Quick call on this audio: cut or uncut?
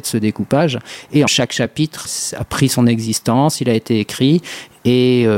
cut